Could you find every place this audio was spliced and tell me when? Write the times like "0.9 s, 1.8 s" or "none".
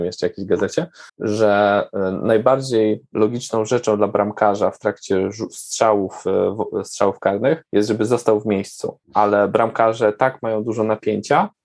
1.1 s, 7.7 s, 9.0 s